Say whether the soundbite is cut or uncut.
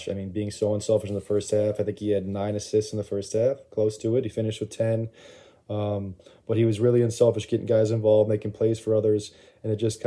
uncut